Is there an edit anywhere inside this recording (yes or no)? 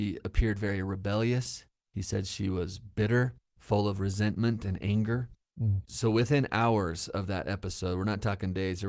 no